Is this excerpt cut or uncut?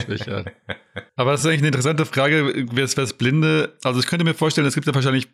uncut